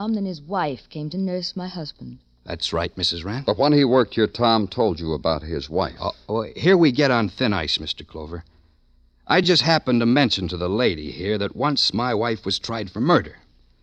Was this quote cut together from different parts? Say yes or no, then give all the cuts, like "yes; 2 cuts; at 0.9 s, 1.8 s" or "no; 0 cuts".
no; 0 cuts